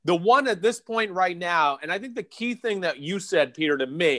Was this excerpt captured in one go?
yes; 0 cuts

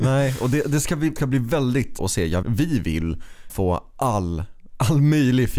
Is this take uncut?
no; 4 cuts; at 1.2 s, 2.0 s, 2.4 s, 3.5 s

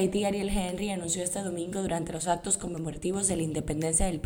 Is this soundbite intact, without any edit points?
yes; 0 cuts

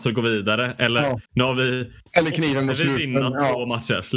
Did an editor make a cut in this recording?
yes; 1 cut; at 1.2 s

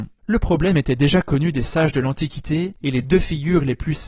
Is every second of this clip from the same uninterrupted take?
yes; 0 cuts

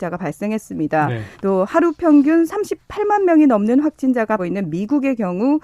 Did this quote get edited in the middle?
yes; 2 cuts; at 1.3 s, 4.4 s

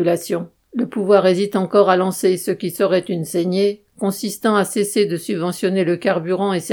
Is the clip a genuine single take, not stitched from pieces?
yes; 0 cuts

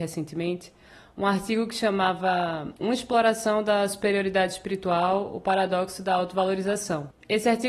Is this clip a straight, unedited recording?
no; 1 cut; at 2.8 s

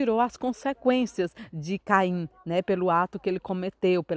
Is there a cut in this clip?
no; 0 cuts

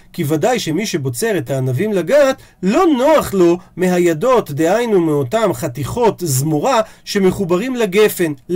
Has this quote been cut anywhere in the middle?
no; 0 cuts

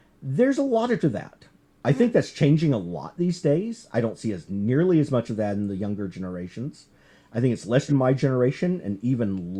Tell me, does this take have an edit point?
yes; 2 cuts; at 1.0 s, 7.9 s

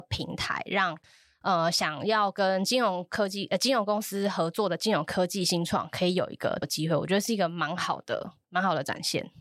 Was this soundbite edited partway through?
yes; 1 cut; at 6.6 s

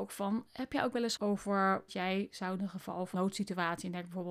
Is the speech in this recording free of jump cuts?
no; 4 cuts; at 1.2 s, 1.9 s, 2.6 s, 3.1 s

